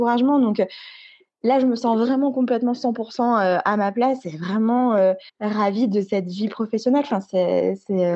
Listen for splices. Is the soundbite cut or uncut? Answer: cut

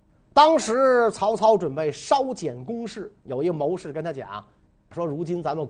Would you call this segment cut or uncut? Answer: cut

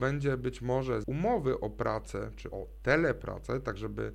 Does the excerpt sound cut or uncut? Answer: cut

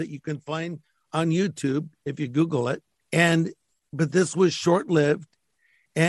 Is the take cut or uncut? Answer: cut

